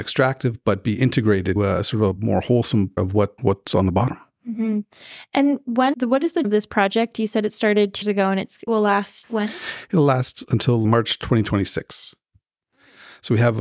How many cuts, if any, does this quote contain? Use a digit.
9